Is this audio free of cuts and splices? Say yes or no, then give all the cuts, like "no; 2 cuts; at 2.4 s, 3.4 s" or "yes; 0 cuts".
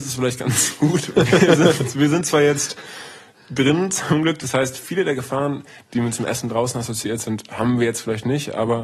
yes; 0 cuts